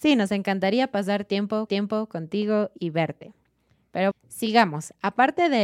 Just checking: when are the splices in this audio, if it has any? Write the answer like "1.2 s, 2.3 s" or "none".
1.7 s, 4.1 s